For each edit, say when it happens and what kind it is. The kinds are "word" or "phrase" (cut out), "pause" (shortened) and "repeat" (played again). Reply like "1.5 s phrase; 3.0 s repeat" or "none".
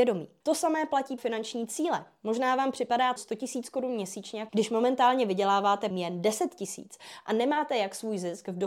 1.2 s word; 3.2 s word; 4.5 s word; 5.9 s word